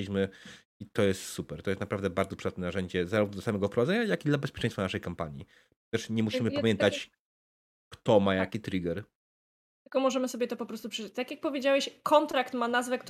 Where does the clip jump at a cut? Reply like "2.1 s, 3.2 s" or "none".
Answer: none